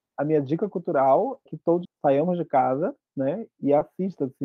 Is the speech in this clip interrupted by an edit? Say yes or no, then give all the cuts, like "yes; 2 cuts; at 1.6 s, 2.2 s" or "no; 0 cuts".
yes; 2 cuts; at 1.5 s, 1.8 s